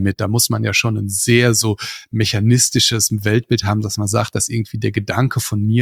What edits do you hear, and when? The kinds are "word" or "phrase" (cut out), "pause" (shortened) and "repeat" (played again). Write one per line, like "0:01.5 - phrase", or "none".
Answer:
none